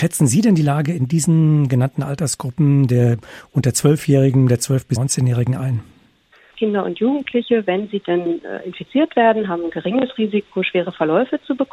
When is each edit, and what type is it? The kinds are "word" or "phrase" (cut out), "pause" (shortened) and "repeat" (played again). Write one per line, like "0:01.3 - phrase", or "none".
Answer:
none

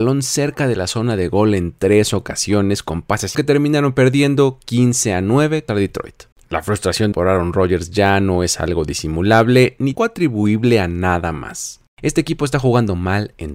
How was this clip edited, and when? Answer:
0:03.3 - phrase
0:05.7 - word
0:06.3 - pause
0:07.1 - word
0:10.0 - word
0:11.9 - pause

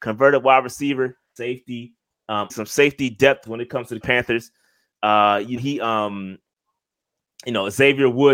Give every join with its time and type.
0:01.4 - word
0:02.5 - word
0:03.5 - word
0:04.0 - word
0:05.6 - word

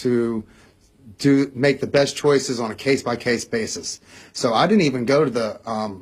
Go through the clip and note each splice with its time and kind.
none

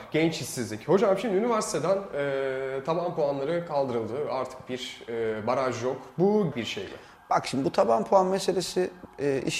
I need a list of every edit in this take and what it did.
0:06.5 - phrase

